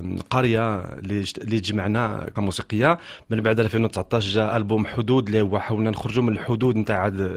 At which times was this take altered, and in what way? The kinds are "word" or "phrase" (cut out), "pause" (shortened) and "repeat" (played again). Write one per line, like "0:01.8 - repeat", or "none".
0:02.3 - word